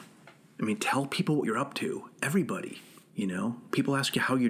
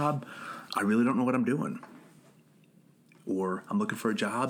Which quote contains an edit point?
first; 2 cuts; at 1.4 s, 3.1 s

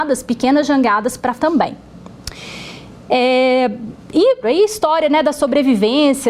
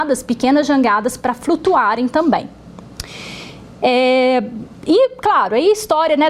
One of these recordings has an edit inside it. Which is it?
first; 2 cuts; at 1.4 s, 4.4 s

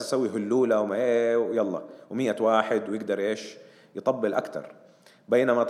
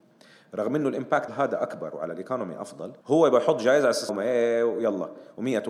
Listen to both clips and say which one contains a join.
second; 3 cuts; at 1.3 s, 3.0 s, 4.1 s

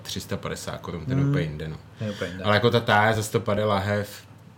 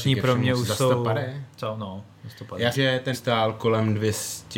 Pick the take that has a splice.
second; 3 cuts; at 2.2 s, 2.7 s, 3.1 s

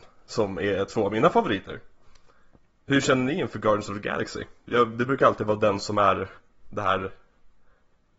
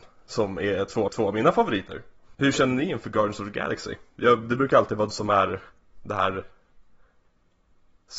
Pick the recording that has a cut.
second; 3 cuts; at 1.1 s, 2.3 s, 5.1 s

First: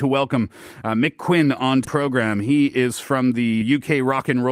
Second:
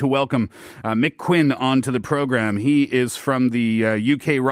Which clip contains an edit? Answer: first; 2 cuts; at 1.8 s, 3.6 s

